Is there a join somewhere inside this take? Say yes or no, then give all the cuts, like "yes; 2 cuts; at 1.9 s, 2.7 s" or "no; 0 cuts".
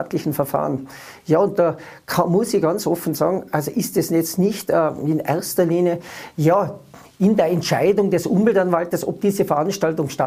no; 0 cuts